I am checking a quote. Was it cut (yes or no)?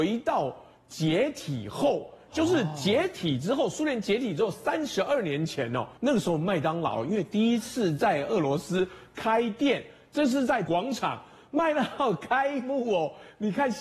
yes